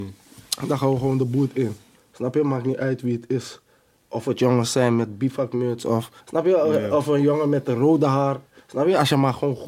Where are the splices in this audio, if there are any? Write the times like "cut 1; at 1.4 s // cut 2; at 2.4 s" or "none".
cut 1; at 6.2 s

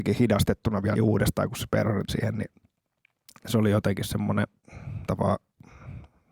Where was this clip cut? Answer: cut 1; at 1.0 s // cut 2; at 2.1 s // cut 3; at 5.1 s

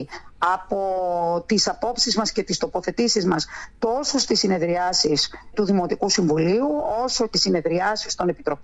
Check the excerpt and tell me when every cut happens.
cut 1; at 5.5 s // cut 2; at 7.3 s

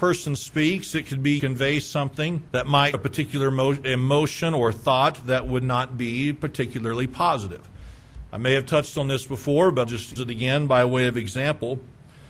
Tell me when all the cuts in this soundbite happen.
cut 1; at 1.4 s // cut 2; at 2.5 s // cut 3; at 2.9 s // cut 4; at 9.8 s // cut 5; at 10.2 s

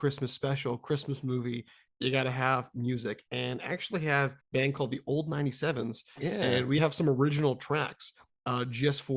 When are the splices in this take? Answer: cut 1; at 4.4 s // cut 2; at 6.8 s

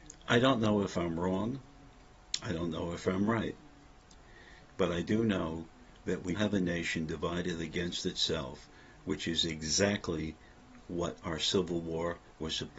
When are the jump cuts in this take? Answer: cut 1; at 6.3 s

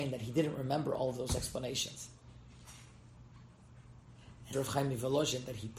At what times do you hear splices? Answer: cut 1; at 4.5 s

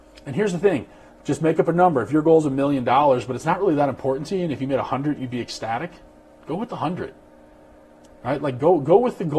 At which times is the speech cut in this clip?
none

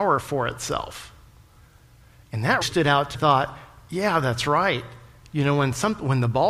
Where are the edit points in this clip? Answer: cut 1; at 2.6 s // cut 2; at 3.1 s

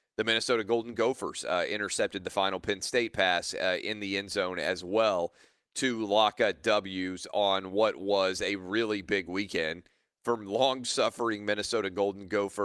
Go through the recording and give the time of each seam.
none

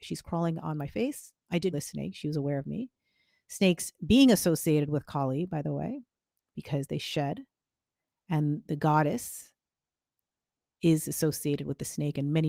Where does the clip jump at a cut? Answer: cut 1; at 1.7 s

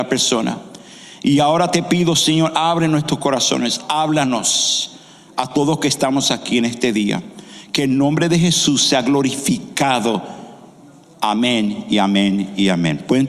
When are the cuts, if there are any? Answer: none

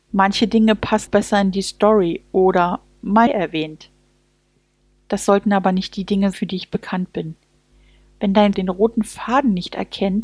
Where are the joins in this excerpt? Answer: cut 1; at 1.1 s // cut 2; at 3.3 s // cut 3; at 6.3 s // cut 4; at 8.5 s

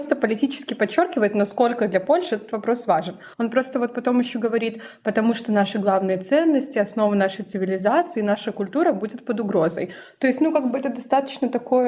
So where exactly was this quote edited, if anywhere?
cut 1; at 3.3 s

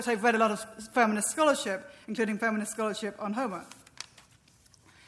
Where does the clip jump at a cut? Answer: none

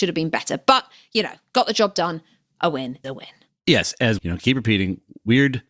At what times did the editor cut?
cut 1; at 3.0 s // cut 2; at 4.2 s

